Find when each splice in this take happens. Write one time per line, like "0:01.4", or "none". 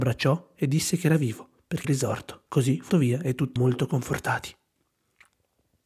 0:01.8
0:02.5
0:02.9
0:03.6

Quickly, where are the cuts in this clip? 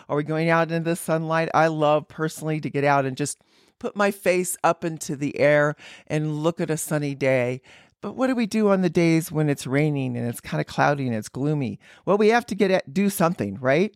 none

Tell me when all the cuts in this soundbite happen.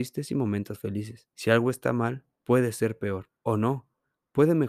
0:01.3
0:02.3
0:03.4

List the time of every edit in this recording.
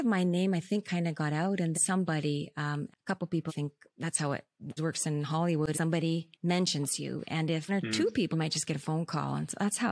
0:01.7
0:02.9
0:03.5
0:04.8
0:05.7
0:06.3
0:07.7
0:08.3

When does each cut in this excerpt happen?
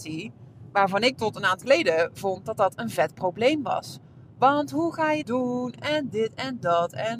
0:01.2
0:01.6
0:05.2

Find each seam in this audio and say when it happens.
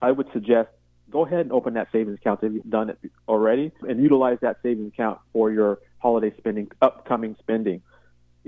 0:02.6
0:03.8
0:07.3

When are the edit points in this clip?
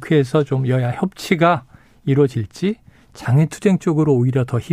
none

